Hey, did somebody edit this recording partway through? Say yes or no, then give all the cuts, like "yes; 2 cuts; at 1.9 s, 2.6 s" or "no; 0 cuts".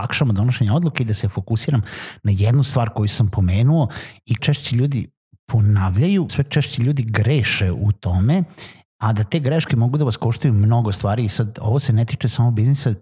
yes; 2 cuts; at 4.4 s, 6.3 s